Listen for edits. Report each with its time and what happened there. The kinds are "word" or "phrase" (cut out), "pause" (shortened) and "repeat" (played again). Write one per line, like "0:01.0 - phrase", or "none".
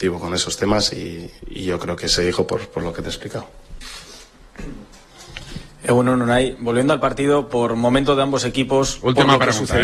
none